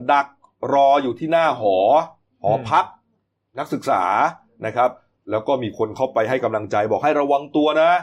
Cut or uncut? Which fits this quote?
uncut